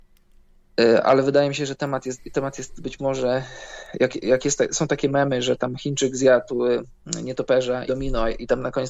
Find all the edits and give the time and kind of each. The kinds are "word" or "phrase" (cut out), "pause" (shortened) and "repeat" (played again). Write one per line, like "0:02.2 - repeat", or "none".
0:02.8 - phrase
0:07.9 - phrase